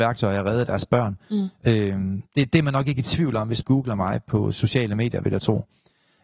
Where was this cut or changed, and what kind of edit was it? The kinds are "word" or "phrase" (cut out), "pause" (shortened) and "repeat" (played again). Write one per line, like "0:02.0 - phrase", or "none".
0:03.6 - word